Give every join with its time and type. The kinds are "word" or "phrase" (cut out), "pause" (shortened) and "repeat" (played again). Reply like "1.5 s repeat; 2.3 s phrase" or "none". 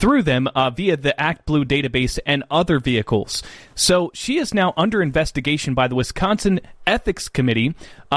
none

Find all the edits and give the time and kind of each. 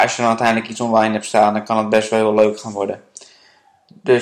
none

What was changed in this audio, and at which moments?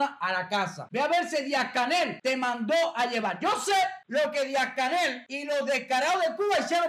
none

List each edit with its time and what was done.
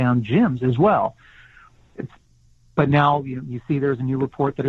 none

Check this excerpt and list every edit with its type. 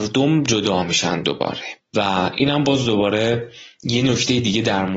none

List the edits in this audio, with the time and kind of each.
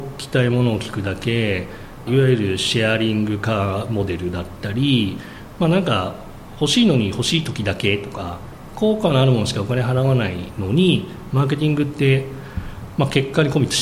2.1 s phrase

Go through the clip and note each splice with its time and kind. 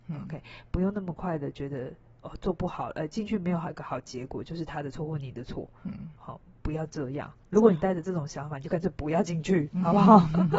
none

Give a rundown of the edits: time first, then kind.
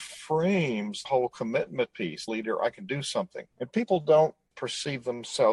1.0 s word; 2.3 s phrase; 3.5 s pause; 4.5 s word

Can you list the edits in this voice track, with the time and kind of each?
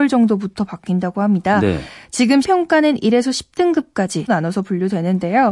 2.4 s word; 4.3 s word

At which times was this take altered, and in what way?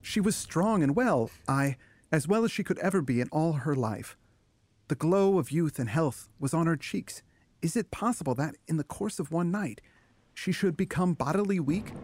none

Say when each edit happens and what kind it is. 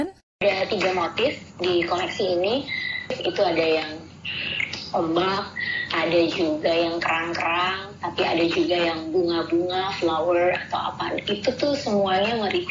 none

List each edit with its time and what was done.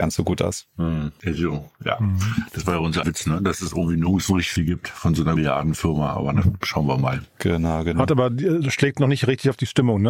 3.0 s word; 4.6 s word; 5.4 s word; 6.4 s word

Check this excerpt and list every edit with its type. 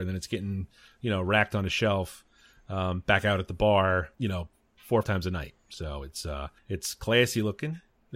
4.1 s pause; 5.0 s word; 6.6 s pause

